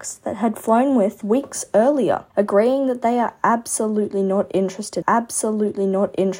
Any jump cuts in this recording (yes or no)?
yes